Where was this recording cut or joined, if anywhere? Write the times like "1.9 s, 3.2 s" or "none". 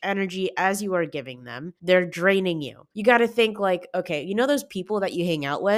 1.8 s, 2.9 s

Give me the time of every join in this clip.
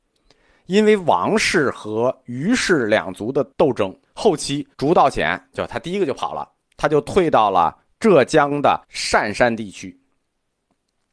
3.5 s, 4.0 s, 4.7 s, 8.8 s

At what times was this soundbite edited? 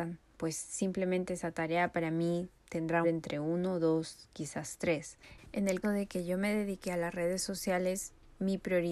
3.0 s, 5.8 s

